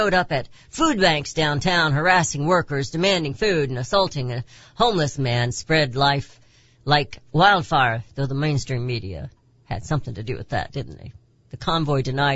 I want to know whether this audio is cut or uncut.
uncut